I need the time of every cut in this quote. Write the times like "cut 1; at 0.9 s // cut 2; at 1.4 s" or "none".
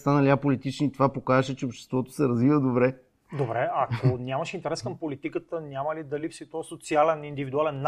none